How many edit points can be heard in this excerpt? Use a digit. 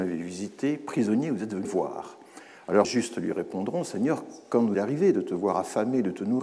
3